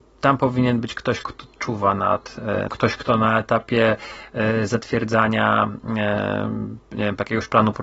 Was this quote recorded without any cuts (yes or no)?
no